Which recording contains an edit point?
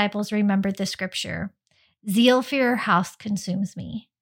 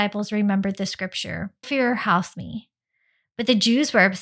second; 2 cuts; at 1.6 s, 2.3 s

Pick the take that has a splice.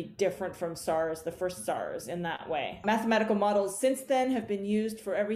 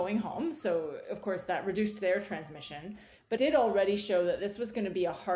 second; 1 cut; at 3.4 s

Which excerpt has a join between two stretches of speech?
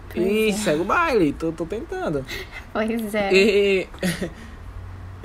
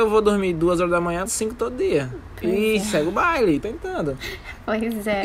second; 2 cuts; at 1.3 s, 3.6 s

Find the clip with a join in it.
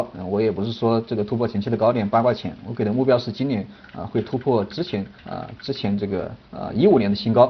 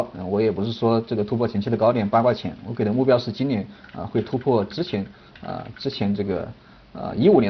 first; 2 cuts; at 5.2 s, 6.5 s

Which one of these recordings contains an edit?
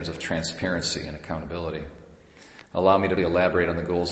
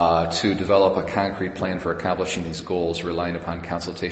first; 1 cut; at 3.2 s

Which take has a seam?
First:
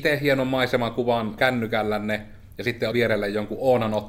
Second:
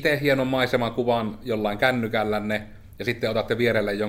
first; 2 cuts; at 1.4 s, 2.9 s

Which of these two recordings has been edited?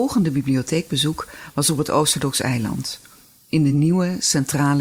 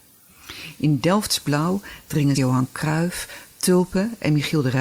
second; 1 cut; at 2.3 s

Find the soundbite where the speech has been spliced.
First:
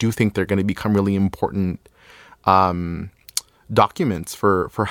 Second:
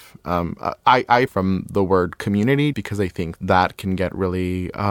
second; 3 cuts; at 1.3 s, 2.7 s, 3.4 s

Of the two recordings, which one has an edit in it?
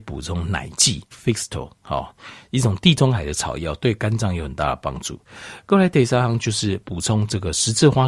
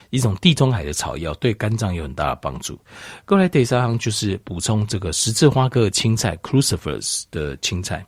first; 1 cut; at 1.1 s

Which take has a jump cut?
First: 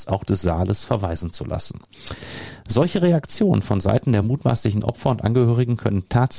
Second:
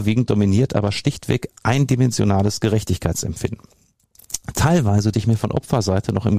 second; 1 cut; at 5.1 s

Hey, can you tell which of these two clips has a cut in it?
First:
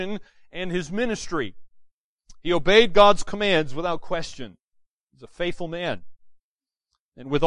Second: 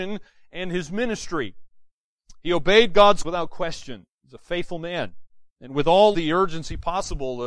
second; 4 cuts; at 3.2 s, 4.1 s, 5.5 s, 6.1 s

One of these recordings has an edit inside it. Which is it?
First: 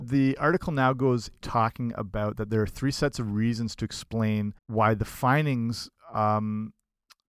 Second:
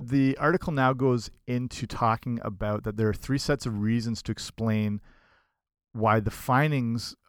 first; 2 cuts; at 1.4 s, 4.6 s

